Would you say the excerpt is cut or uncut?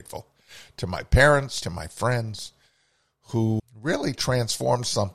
cut